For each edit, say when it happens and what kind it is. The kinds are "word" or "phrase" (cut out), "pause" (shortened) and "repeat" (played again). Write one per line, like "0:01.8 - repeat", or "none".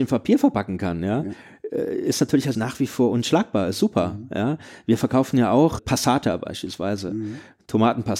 0:02.5 - word
0:05.8 - word